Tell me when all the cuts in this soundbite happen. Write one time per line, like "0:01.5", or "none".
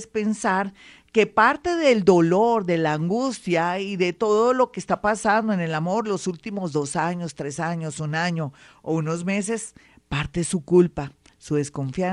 none

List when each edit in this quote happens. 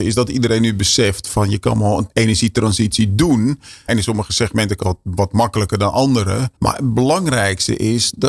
0:04.8
0:06.6

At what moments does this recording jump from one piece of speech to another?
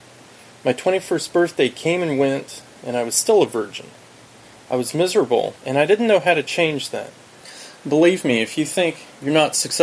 0:05.6

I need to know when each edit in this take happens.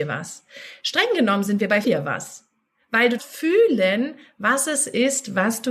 0:01.8
0:03.2

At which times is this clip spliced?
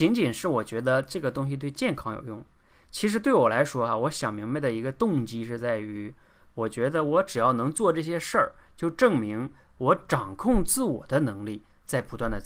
none

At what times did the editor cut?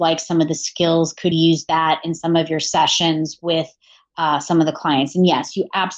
0:01.3

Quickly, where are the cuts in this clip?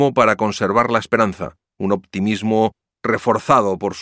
none

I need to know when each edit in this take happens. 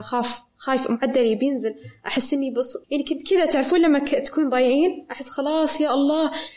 0:02.8

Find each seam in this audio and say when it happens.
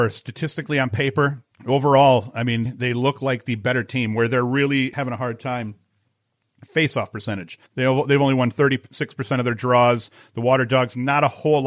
0:01.5
0:02.6
0:04.9
0:07.7

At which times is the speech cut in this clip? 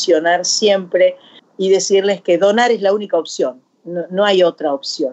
0:01.4

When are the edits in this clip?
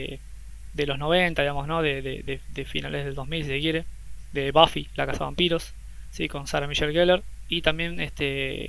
none

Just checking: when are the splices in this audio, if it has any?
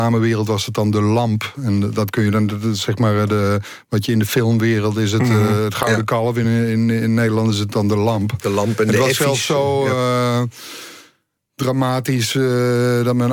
none

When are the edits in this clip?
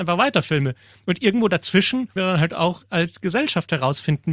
0:02.2

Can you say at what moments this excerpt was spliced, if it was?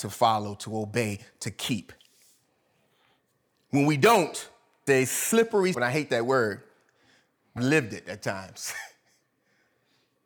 0:04.9
0:05.7
0:07.6

